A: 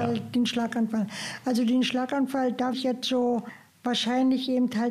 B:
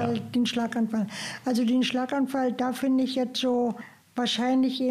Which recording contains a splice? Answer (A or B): A